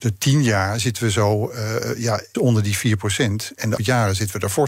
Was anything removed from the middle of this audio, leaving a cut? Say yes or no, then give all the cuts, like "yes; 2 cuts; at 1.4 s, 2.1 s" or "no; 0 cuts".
yes; 2 cuts; at 2.3 s, 3.8 s